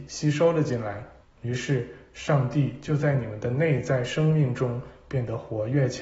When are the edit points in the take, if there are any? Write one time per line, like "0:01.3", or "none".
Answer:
0:01.2